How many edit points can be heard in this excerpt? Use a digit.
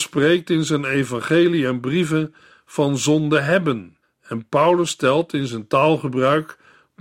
1